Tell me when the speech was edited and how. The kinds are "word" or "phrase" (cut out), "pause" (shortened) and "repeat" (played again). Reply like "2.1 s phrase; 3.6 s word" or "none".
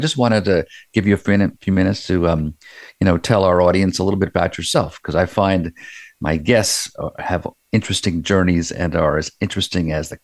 1.6 s pause